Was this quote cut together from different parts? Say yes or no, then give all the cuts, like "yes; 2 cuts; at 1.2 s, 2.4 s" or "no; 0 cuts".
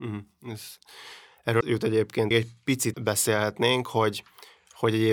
yes; 3 cuts; at 1.6 s, 2.3 s, 2.9 s